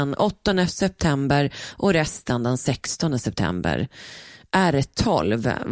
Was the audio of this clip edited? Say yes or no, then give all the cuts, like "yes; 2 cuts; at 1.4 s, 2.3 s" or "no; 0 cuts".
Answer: no; 0 cuts